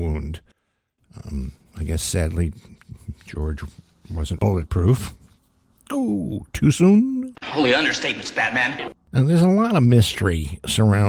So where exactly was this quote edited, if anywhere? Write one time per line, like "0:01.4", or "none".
0:04.4